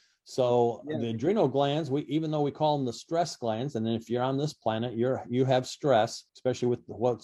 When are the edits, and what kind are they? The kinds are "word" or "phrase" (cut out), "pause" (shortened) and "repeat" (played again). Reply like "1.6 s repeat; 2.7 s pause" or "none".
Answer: 6.3 s pause